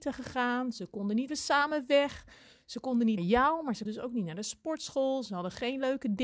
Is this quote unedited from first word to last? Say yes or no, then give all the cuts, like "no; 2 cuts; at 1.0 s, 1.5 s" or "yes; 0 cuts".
no; 3 cuts; at 1.3 s, 3.2 s, 3.9 s